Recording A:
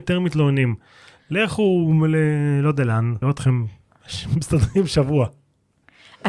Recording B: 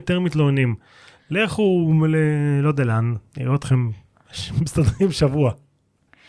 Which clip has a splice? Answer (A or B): A